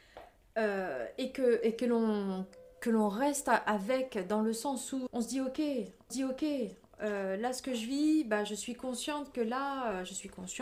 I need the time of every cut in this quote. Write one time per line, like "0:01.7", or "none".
0:05.1
0:06.1